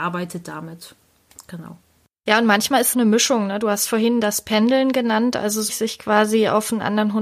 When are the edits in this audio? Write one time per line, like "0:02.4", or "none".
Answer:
0:02.9
0:05.7